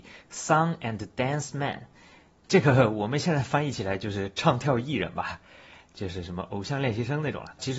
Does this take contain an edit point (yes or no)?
no